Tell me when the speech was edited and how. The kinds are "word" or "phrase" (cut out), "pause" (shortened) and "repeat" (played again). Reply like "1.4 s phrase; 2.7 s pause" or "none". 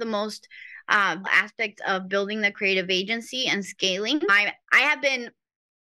1.2 s word; 4.6 s pause